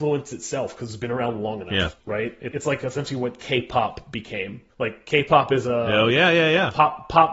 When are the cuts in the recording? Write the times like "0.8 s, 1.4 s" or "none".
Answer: 2.0 s, 2.5 s, 4.7 s